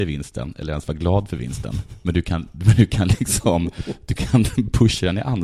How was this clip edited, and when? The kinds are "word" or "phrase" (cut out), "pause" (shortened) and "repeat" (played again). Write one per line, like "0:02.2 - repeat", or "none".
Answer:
none